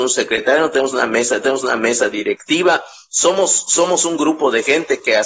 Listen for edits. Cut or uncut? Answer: cut